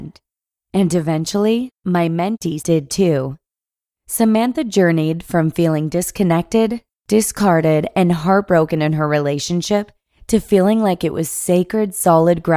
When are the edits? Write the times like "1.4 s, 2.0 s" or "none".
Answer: 2.6 s